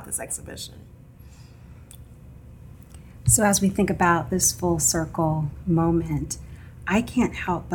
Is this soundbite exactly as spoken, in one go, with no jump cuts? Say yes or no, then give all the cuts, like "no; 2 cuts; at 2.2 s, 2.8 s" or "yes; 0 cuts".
yes; 0 cuts